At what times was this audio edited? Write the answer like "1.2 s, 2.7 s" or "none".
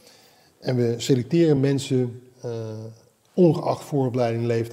none